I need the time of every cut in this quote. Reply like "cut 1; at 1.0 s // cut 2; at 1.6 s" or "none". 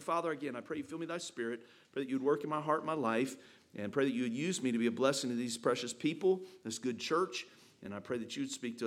none